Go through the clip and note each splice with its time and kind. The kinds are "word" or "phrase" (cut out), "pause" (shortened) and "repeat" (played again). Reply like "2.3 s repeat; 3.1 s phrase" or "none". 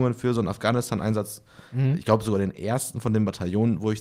none